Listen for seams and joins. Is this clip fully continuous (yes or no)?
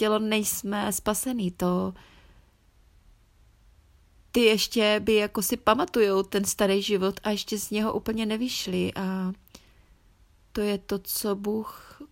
yes